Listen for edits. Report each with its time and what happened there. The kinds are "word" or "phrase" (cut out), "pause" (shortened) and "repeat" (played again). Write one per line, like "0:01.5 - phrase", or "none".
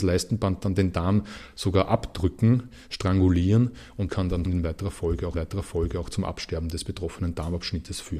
0:04.1 - word
0:04.5 - phrase
0:05.3 - repeat